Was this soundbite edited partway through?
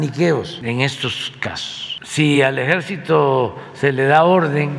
no; 0 cuts

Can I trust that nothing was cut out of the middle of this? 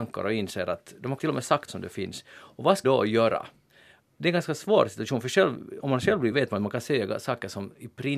no; 6 cuts; at 1.2 s, 1.7 s, 2.8 s, 4.2 s, 5.8 s, 6.3 s

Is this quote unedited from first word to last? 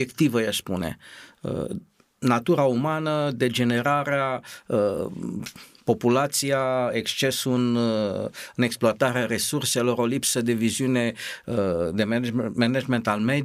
yes; 0 cuts

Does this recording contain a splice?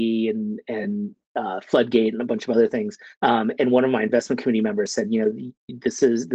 yes; 1 cut; at 3.1 s

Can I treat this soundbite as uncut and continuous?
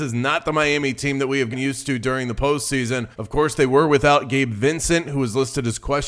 no; 2 cuts; at 1.5 s, 3.1 s

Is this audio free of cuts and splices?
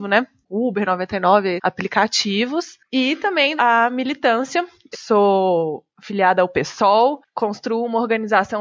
no; 4 cuts; at 1.6 s, 2.9 s, 3.6 s, 4.9 s

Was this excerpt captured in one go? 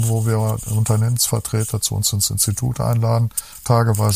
yes; 0 cuts

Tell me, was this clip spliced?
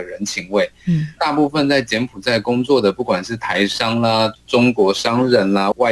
yes; 1 cut; at 1.2 s

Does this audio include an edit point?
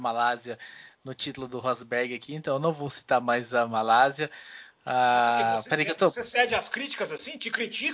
no; 0 cuts

